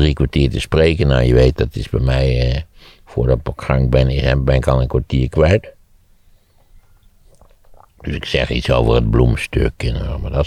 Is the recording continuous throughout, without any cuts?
yes; 0 cuts

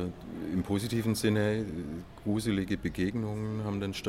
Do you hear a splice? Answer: no; 0 cuts

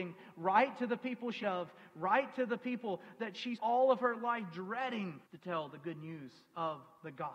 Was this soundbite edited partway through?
yes; 3 cuts; at 1.4 s, 3.6 s, 5.3 s

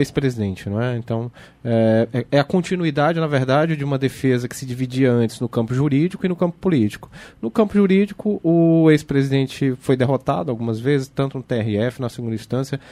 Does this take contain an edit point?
no; 0 cuts

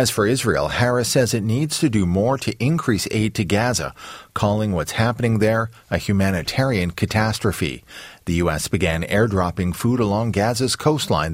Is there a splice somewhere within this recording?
no; 0 cuts

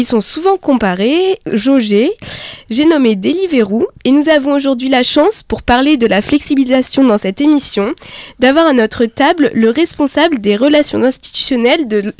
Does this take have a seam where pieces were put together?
yes; 2 cuts; at 1.4 s, 4.0 s

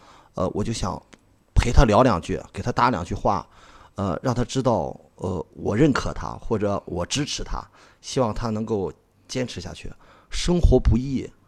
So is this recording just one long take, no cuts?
yes; 0 cuts

